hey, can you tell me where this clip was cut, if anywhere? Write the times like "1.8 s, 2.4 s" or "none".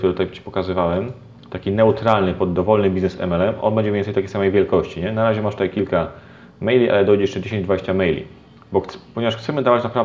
none